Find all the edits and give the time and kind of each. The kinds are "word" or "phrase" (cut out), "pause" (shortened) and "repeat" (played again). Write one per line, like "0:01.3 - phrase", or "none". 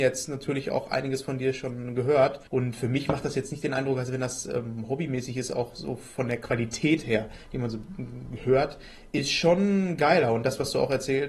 0:02.5 - pause